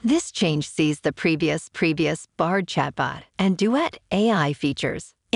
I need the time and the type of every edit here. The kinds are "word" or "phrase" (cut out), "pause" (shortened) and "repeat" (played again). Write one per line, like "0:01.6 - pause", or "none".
0:01.7 - repeat
0:03.3 - pause